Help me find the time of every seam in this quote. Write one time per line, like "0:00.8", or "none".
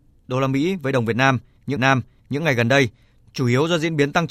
0:01.8